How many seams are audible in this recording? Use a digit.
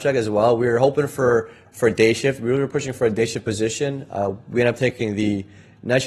0